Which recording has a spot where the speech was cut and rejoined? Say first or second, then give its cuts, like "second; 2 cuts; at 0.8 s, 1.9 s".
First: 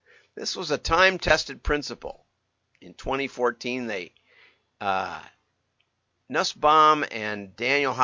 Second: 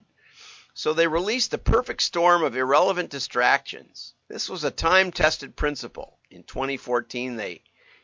second; 2 cuts; at 4.2 s, 6.2 s